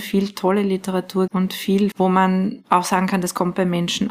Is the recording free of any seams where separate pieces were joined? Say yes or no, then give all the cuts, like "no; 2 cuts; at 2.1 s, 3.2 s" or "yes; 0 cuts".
no; 2 cuts; at 1.3 s, 1.9 s